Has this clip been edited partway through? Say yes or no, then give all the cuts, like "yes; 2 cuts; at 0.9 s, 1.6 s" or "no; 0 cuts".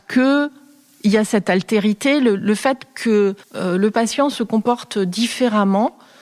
yes; 1 cut; at 3.4 s